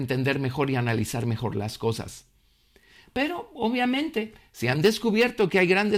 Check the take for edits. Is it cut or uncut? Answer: uncut